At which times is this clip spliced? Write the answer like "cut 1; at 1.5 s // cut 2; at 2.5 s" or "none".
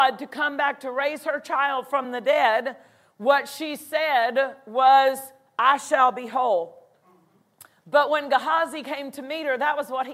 none